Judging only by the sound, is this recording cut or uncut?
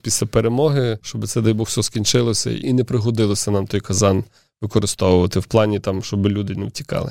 uncut